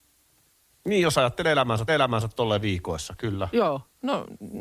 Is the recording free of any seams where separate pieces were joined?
no; 1 cut; at 1.9 s

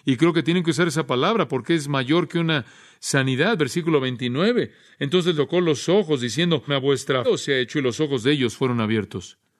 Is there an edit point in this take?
yes; 3 cuts; at 5.3 s, 6.7 s, 7.2 s

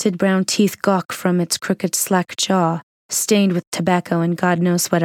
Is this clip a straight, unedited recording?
yes; 0 cuts

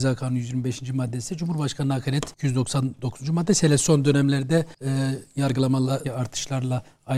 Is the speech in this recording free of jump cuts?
no; 3 cuts; at 2.3 s, 4.7 s, 6.0 s

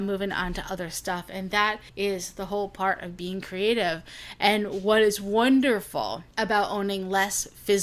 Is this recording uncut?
no; 2 cuts; at 1.9 s, 6.3 s

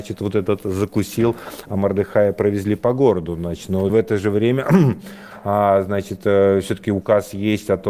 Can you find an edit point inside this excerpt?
yes; 1 cut; at 3.9 s

